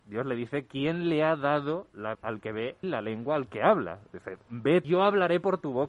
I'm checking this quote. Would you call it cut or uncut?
cut